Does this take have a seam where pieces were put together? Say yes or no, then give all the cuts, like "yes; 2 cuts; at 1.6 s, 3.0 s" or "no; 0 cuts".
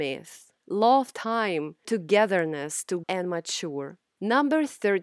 yes; 3 cuts; at 1.1 s, 1.8 s, 3.0 s